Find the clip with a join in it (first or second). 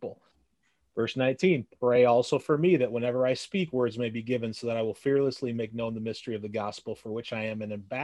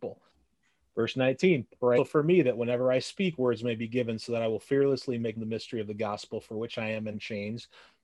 second